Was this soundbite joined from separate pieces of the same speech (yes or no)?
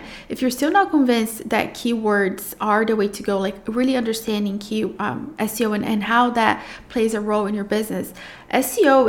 no